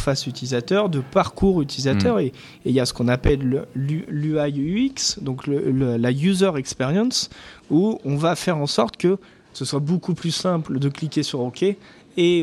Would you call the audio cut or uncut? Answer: uncut